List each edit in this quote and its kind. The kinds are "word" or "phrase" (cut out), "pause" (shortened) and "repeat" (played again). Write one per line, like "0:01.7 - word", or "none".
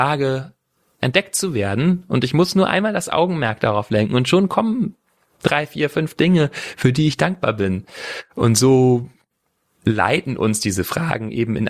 none